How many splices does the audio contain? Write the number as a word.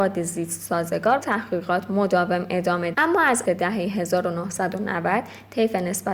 three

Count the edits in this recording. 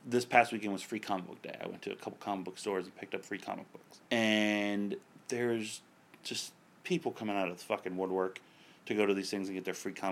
one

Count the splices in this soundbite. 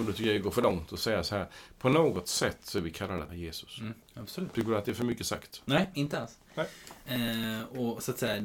two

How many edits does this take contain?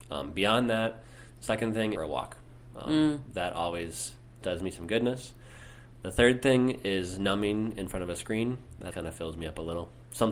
three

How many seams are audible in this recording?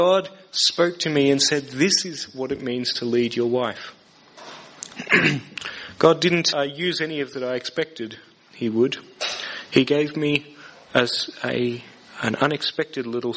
two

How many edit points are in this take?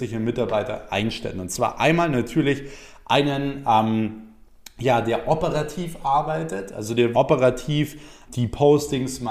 two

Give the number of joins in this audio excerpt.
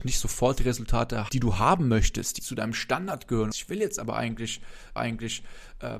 four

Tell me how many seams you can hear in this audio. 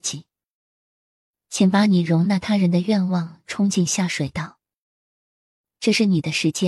zero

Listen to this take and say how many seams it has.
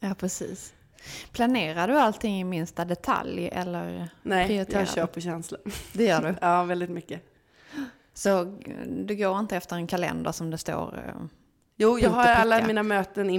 zero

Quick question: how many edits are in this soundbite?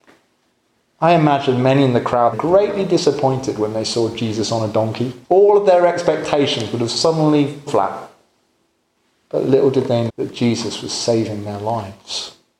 four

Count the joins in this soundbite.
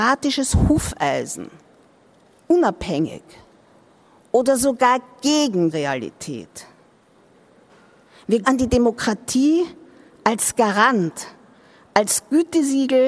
two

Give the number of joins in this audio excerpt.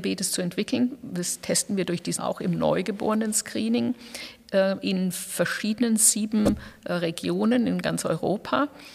one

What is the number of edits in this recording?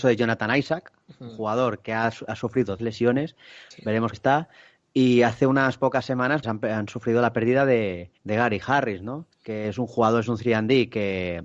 five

